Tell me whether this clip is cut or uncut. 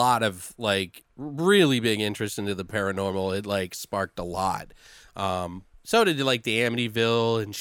uncut